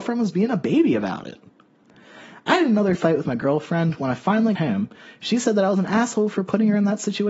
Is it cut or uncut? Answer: cut